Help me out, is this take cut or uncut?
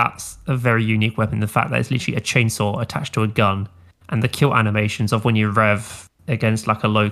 uncut